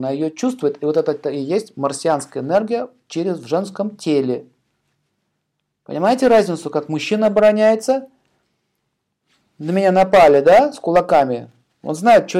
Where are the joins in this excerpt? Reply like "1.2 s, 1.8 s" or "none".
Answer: 1.2 s